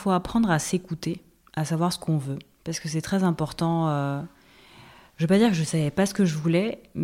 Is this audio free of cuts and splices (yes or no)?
yes